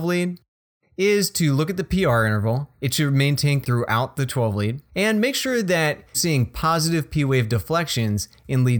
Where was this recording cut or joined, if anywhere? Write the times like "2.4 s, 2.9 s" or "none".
3.6 s, 4.9 s, 6.1 s